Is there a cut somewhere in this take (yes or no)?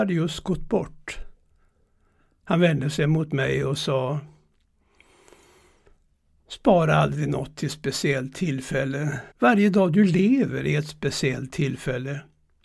yes